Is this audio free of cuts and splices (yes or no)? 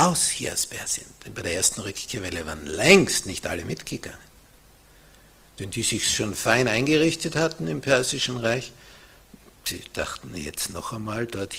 yes